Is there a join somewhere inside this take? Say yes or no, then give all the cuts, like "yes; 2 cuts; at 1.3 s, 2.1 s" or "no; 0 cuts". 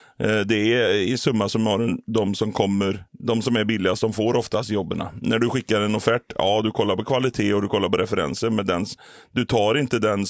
yes; 1 cut; at 3.1 s